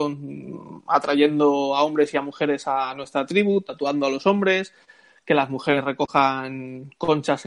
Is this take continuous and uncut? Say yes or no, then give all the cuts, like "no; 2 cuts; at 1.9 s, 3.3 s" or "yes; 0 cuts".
yes; 0 cuts